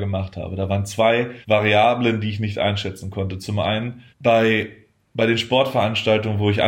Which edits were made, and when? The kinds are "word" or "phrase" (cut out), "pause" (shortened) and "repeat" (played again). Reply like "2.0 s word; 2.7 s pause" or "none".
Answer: 1.4 s pause; 4.1 s pause